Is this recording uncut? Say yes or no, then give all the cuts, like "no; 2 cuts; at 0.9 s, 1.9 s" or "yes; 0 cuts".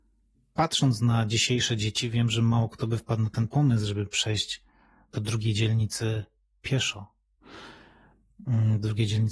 yes; 0 cuts